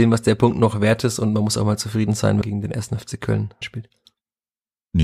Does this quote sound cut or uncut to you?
cut